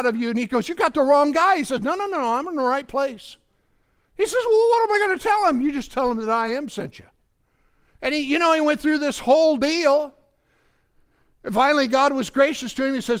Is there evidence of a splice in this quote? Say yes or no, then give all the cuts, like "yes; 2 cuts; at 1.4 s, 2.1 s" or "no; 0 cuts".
no; 0 cuts